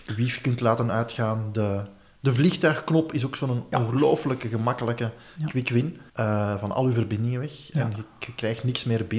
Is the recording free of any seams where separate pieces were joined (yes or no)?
no